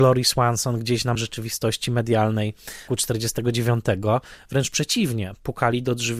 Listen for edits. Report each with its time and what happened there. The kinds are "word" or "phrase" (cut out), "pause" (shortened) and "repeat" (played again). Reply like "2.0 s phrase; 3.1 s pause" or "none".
1.2 s word; 2.9 s word